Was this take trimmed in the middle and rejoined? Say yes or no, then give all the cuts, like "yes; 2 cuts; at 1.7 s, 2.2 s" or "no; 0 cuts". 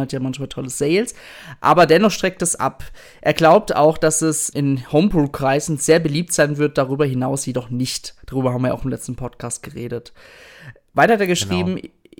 yes; 1 cut; at 4.5 s